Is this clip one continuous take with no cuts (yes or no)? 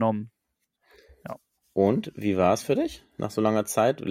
yes